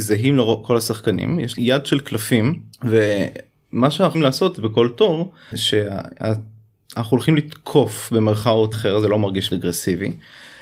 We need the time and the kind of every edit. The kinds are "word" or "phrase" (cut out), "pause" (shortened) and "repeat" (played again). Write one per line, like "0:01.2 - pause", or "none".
0:01.6 - word
0:02.7 - pause
0:04.1 - word
0:05.5 - word
0:08.7 - word
0:09.5 - word